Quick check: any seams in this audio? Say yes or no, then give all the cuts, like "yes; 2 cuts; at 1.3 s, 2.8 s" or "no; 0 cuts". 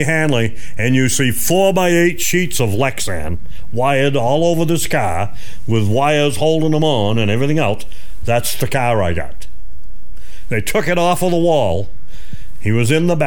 no; 0 cuts